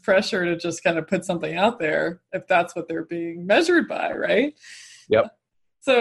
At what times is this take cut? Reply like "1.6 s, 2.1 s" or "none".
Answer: none